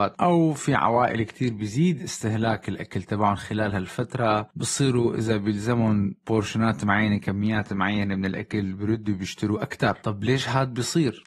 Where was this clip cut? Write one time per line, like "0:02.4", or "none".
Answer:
none